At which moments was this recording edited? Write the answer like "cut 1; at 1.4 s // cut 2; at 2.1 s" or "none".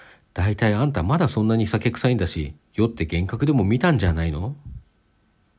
cut 1; at 2.6 s